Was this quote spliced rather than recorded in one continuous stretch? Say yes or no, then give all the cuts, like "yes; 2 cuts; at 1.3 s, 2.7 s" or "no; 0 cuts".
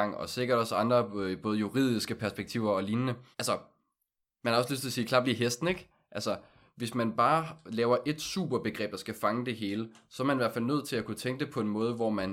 yes; 1 cut; at 3.3 s